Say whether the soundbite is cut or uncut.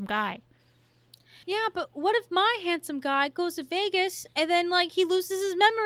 cut